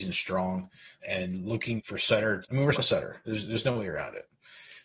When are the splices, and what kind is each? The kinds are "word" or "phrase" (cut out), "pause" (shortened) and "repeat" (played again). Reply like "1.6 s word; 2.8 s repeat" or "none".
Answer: 1.0 s word; 1.8 s word; 2.4 s word; 2.7 s word